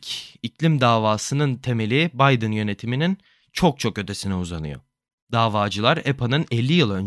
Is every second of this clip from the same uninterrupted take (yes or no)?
yes